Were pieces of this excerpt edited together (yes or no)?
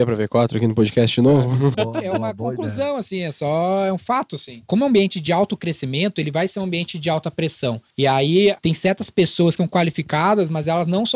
yes